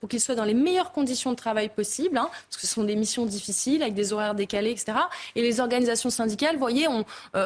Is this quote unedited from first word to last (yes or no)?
yes